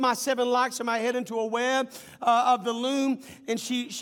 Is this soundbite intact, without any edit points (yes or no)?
yes